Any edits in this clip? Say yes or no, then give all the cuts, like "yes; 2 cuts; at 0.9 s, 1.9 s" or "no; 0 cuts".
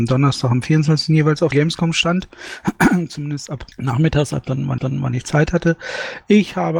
yes; 3 cuts; at 1.5 s, 3.7 s, 4.8 s